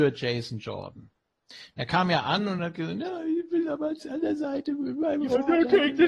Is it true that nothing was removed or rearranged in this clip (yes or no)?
yes